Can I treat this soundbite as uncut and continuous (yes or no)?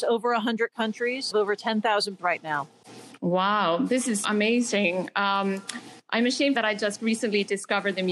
no